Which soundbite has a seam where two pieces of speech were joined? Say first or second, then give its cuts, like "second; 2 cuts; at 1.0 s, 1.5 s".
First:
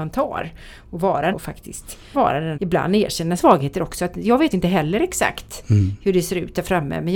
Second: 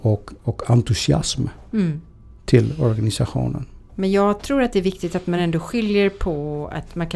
first; 5 cuts; at 1.3 s, 2.1 s, 2.5 s, 3.4 s, 4.5 s